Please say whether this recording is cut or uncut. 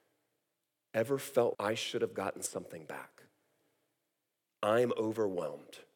cut